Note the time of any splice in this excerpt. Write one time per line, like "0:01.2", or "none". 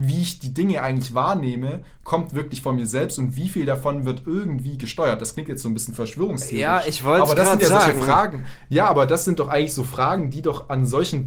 none